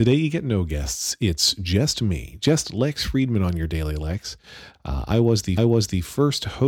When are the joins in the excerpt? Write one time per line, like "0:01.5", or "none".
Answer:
0:05.6